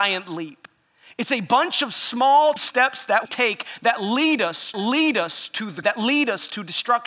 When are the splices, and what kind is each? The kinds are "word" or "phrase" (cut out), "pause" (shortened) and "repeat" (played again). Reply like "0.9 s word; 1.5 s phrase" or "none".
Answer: 2.6 s word; 3.3 s word; 4.7 s repeat; 5.8 s word